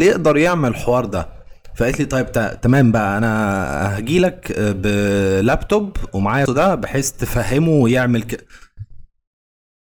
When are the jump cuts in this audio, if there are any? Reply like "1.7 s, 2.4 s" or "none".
6.5 s